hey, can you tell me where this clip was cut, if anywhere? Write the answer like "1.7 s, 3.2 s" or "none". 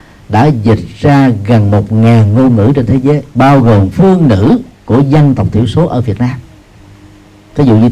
3.3 s, 3.9 s, 4.7 s